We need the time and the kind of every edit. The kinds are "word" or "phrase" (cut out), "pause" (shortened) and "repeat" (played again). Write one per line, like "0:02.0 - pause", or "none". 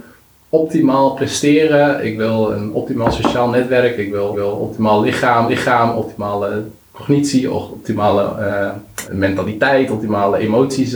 0:04.3 - repeat
0:05.5 - repeat
0:09.0 - word